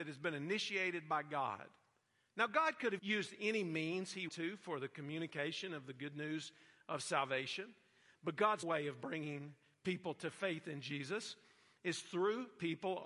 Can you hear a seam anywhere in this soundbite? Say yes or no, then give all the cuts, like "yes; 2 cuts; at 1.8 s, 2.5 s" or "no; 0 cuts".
yes; 3 cuts; at 3.0 s, 4.3 s, 8.6 s